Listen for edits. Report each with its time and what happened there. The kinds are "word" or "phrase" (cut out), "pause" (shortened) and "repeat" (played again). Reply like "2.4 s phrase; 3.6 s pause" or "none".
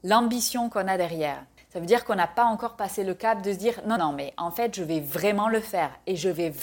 1.6 s pause; 4.0 s word